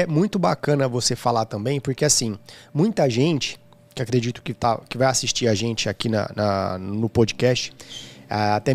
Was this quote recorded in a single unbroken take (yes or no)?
yes